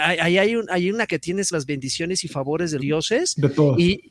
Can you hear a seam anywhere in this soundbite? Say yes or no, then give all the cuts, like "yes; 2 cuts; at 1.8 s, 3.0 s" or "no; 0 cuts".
yes; 3 cuts; at 1.1 s, 1.5 s, 2.8 s